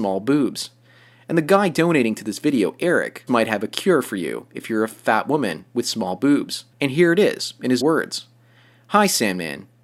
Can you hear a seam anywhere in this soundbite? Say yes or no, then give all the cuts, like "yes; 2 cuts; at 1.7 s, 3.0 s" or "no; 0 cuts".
yes; 3 cuts; at 3.3 s, 6.7 s, 7.8 s